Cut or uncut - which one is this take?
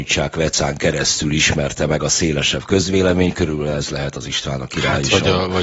uncut